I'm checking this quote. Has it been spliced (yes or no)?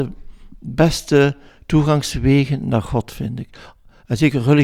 no